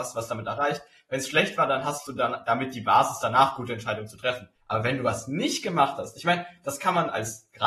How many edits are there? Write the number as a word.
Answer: one